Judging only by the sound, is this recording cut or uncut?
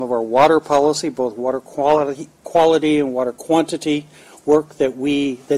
uncut